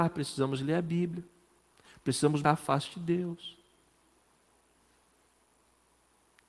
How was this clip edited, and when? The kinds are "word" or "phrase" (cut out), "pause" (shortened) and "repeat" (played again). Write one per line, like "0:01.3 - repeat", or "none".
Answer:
0:02.4 - word